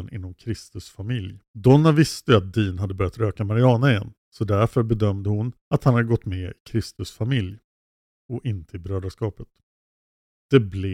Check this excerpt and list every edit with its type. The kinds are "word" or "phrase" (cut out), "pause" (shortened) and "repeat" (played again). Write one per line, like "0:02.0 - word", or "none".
0:01.5 - pause
0:04.2 - pause
0:05.6 - pause